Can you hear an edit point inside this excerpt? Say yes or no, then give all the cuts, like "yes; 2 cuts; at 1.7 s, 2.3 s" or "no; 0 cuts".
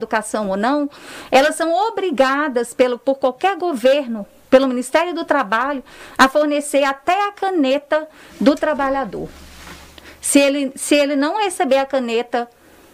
no; 0 cuts